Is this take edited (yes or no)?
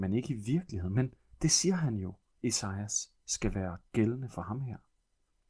no